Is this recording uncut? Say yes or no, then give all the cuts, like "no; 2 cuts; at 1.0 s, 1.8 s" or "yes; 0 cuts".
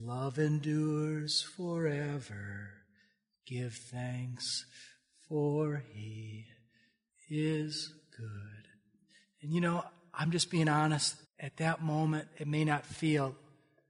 no; 1 cut; at 11.2 s